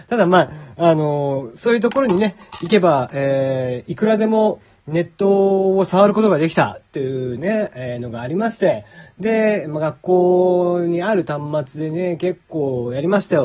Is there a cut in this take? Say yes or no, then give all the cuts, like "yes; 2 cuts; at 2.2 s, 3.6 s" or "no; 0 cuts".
no; 0 cuts